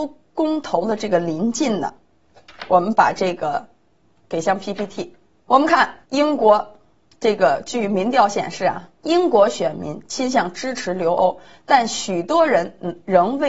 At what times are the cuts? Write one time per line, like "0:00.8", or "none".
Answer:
none